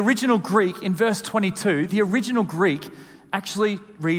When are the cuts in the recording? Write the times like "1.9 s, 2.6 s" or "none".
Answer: none